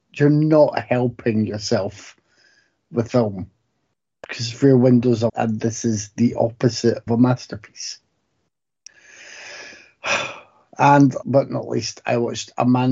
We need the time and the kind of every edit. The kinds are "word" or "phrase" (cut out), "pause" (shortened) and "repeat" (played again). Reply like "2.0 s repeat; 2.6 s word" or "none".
3.1 s word; 5.3 s word; 7.1 s word; 11.2 s word